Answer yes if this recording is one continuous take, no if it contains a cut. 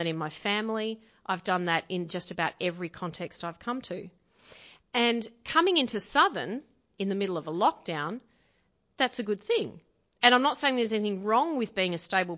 yes